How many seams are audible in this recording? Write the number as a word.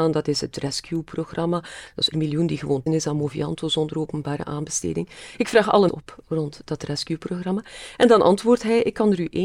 three